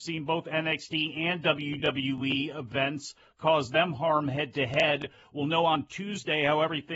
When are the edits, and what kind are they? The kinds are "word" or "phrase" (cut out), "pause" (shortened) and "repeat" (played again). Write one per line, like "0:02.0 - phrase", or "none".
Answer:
none